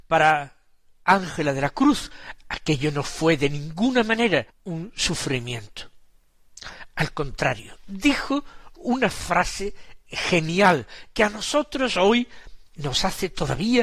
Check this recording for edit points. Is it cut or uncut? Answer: cut